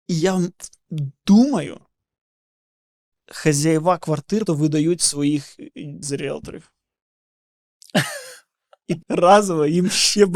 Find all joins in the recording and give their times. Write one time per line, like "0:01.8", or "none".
0:03.1
0:04.5
0:06.0
0:09.0